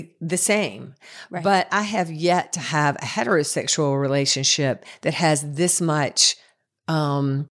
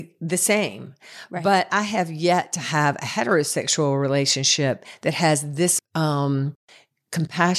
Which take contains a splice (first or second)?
second